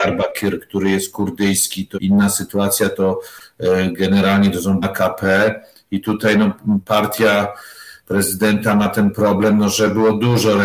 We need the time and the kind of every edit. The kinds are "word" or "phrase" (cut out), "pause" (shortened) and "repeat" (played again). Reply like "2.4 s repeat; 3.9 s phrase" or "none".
1.9 s word; 4.8 s word